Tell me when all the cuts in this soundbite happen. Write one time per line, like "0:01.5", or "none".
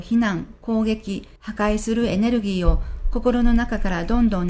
0:01.4